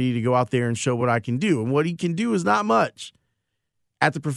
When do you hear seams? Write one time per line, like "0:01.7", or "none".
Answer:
none